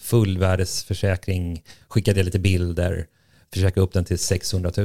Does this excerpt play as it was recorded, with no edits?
yes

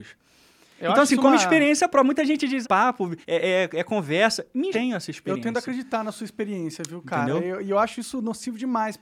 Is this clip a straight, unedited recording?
no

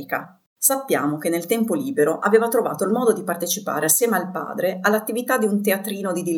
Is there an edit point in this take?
no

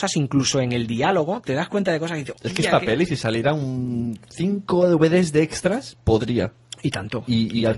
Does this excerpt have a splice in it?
yes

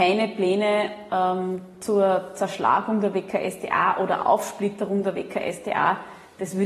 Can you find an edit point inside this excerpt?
no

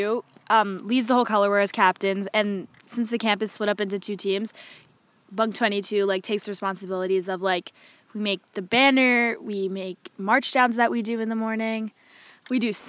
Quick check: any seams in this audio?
no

